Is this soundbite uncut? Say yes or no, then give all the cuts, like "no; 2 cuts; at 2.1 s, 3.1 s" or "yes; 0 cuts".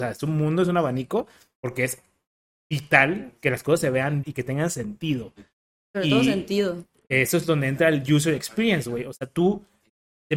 no; 1 cut; at 4.2 s